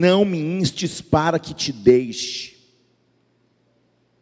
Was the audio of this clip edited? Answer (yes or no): no